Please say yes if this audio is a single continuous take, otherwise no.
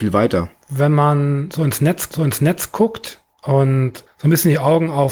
no